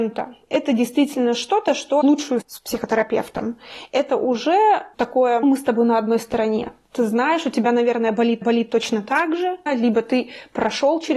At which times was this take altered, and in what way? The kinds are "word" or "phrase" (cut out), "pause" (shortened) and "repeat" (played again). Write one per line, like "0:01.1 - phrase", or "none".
0:02.0 - word
0:02.4 - word
0:04.9 - word
0:05.4 - word
0:06.8 - pause
0:08.4 - repeat
0:09.7 - word